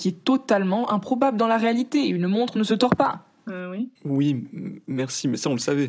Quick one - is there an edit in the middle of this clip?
yes; 1 cut; at 4.0 s

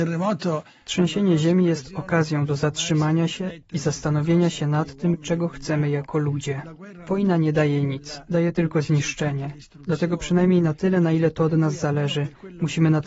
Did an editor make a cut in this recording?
no; 0 cuts

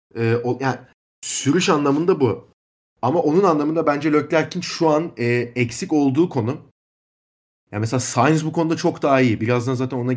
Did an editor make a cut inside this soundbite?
no; 0 cuts

